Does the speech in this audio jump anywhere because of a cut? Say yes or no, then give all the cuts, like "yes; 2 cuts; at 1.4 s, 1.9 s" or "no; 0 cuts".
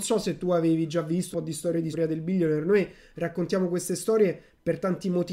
yes; 2 cuts; at 1.3 s, 1.9 s